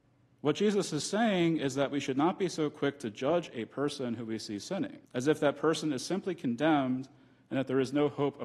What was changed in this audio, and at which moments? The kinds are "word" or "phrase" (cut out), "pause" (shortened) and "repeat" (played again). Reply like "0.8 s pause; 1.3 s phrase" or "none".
5.0 s pause